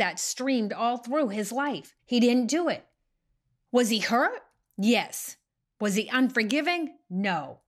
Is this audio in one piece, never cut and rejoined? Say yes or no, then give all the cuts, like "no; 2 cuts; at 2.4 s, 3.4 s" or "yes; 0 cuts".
no; 1 cut; at 2.0 s